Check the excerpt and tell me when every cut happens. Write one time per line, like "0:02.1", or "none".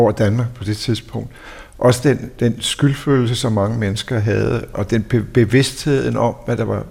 0:04.7